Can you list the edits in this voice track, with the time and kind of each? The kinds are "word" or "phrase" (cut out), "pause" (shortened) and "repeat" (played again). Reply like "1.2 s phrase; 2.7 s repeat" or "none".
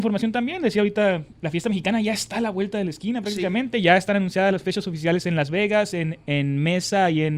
none